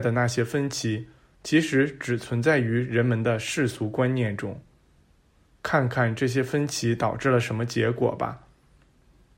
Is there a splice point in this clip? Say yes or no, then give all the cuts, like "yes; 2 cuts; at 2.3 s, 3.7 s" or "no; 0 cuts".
no; 0 cuts